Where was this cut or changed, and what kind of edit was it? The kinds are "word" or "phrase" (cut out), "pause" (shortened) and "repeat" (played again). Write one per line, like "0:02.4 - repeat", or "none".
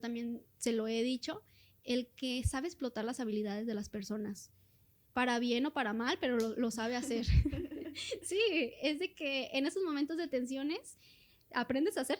none

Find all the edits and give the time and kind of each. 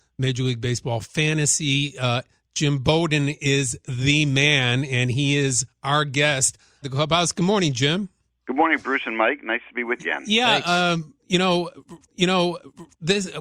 0:06.8 - phrase
0:10.0 - word
0:12.1 - repeat

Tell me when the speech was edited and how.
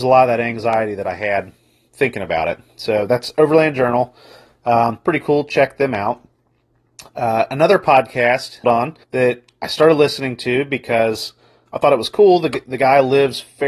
0:08.6 - phrase
0:09.0 - pause

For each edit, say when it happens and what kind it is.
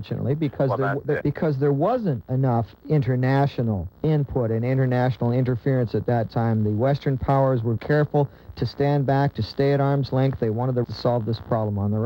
0:01.2 - word
0:04.0 - pause
0:07.8 - word
0:10.8 - word

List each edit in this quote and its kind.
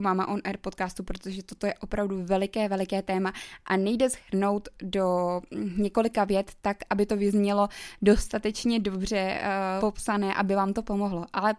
0:09.8 - word

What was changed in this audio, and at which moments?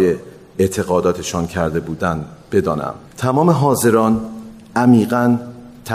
0:03.1 - pause

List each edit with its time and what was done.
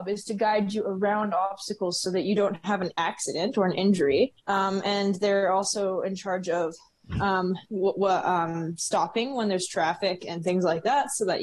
0:04.4 - pause
0:07.7 - pause

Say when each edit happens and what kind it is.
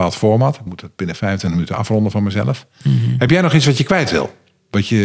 none

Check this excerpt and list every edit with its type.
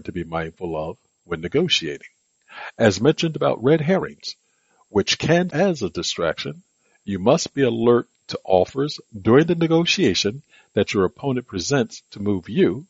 0:05.5 - word

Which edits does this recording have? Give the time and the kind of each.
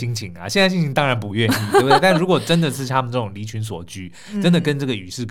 none

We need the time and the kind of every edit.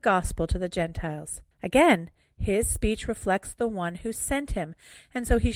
0:01.5 - pause

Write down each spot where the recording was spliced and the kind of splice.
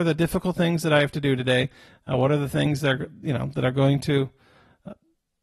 none

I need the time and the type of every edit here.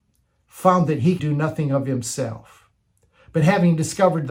0:01.2 - word

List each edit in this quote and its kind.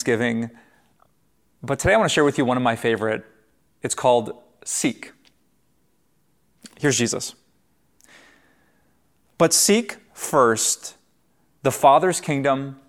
none

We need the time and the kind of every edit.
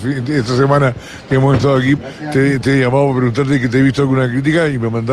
0:02.0 - word

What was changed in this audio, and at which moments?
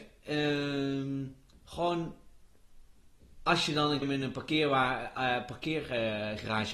0:04.0 - word

